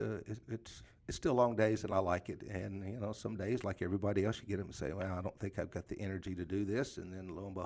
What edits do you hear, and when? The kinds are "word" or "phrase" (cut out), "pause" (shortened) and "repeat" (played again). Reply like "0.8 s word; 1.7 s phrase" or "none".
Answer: none